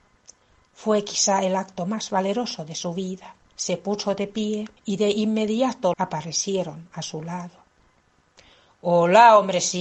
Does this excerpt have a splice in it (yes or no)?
yes